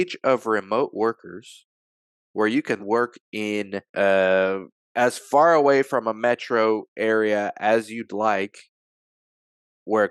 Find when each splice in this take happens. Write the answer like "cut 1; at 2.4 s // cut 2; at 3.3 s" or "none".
cut 1; at 2.8 s // cut 2; at 3.9 s